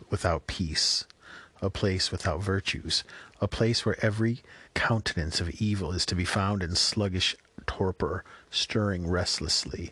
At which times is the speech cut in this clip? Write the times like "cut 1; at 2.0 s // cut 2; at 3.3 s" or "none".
cut 1; at 4.7 s